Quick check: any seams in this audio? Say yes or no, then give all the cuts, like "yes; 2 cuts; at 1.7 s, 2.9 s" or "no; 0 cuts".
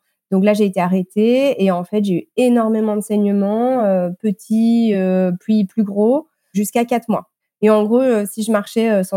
no; 0 cuts